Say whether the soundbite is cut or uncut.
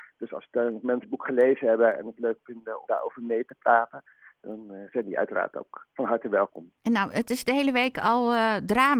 cut